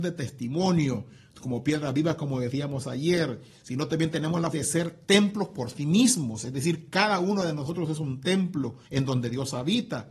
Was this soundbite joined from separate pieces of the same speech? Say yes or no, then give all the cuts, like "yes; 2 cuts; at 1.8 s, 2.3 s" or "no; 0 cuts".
yes; 2 cuts; at 4.5 s, 8.8 s